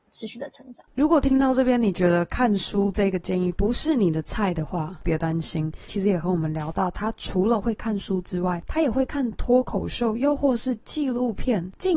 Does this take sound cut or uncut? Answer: cut